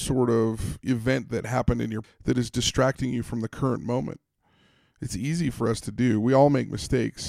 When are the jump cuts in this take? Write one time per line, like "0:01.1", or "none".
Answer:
0:02.0